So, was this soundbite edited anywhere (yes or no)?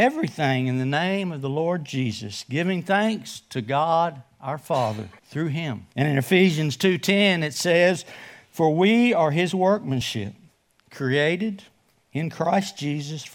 yes